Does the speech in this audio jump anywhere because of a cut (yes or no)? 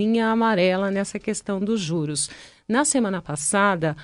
no